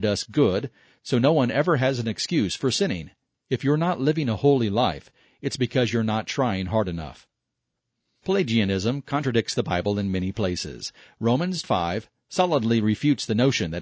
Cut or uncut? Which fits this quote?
cut